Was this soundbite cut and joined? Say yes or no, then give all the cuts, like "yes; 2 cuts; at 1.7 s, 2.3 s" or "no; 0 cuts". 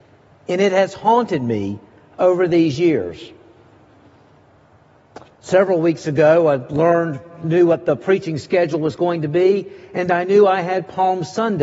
no; 0 cuts